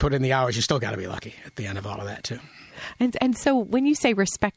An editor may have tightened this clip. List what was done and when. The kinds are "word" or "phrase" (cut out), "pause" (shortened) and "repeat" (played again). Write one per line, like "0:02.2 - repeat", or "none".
none

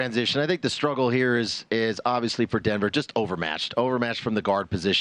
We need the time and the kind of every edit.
none

